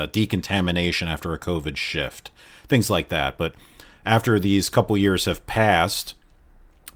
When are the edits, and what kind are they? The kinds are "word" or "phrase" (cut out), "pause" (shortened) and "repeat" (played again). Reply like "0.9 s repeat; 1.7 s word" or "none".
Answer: none